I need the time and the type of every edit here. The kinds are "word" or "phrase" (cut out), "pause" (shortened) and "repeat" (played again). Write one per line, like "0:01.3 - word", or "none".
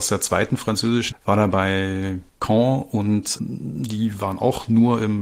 0:01.1 - word
0:02.3 - pause
0:03.4 - word